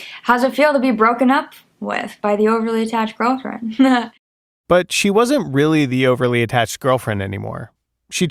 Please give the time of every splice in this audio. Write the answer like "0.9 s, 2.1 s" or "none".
4.2 s

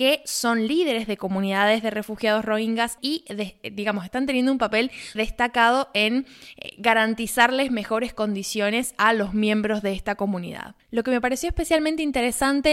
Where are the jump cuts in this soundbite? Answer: 3.0 s, 5.2 s

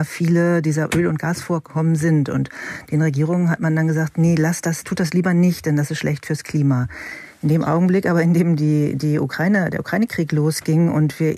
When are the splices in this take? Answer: none

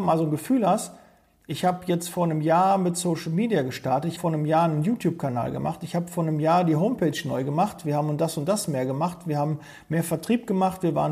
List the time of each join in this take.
4.2 s

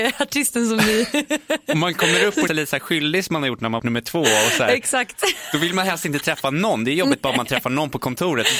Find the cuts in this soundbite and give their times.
2.5 s, 3.8 s

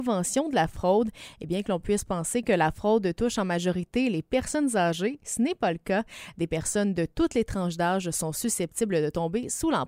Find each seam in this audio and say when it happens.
none

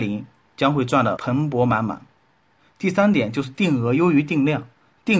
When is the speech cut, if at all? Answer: none

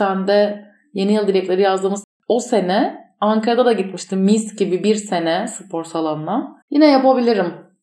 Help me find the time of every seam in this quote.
6.6 s

